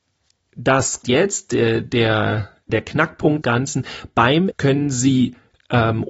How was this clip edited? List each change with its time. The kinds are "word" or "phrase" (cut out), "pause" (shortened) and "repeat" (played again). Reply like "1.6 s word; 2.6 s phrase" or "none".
1.0 s word; 2.7 s word; 3.4 s word; 4.5 s word